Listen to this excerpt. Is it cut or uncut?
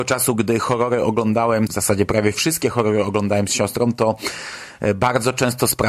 cut